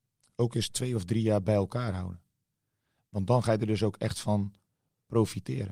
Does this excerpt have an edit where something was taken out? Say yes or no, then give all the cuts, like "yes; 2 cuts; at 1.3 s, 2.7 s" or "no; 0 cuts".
no; 0 cuts